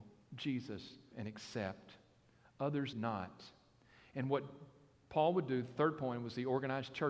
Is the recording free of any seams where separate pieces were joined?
no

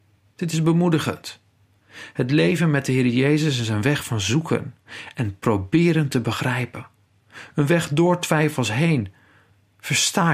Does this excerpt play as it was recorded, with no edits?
yes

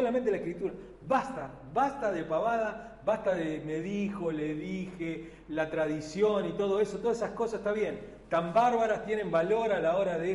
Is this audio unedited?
yes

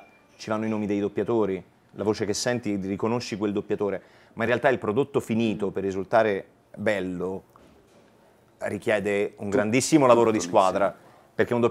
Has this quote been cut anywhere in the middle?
no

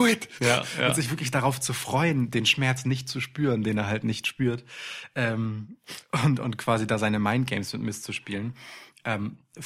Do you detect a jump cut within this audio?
no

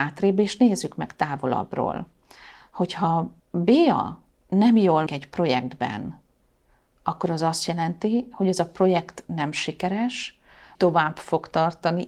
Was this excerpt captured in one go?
no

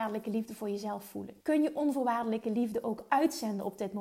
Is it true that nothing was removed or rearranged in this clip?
no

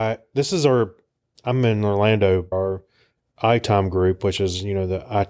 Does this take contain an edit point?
yes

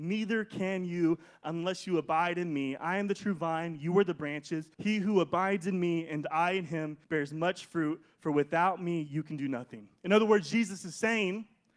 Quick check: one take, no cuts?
no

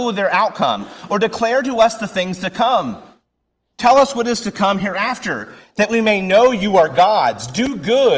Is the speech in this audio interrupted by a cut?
no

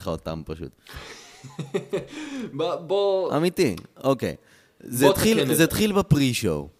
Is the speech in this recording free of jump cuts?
yes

